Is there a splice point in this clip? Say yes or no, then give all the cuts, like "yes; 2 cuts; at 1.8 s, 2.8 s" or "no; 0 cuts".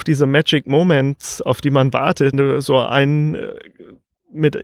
yes; 1 cut; at 2.3 s